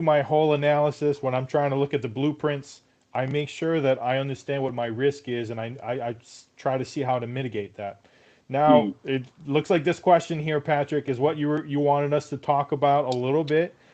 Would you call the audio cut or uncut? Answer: uncut